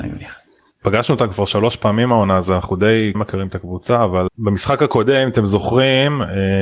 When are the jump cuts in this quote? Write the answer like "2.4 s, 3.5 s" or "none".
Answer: 3.1 s, 4.3 s